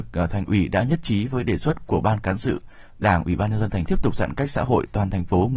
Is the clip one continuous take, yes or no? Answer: no